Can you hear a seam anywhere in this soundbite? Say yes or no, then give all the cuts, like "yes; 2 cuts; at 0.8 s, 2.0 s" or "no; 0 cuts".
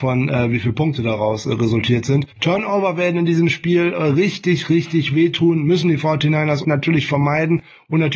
yes; 2 cuts; at 2.3 s, 6.6 s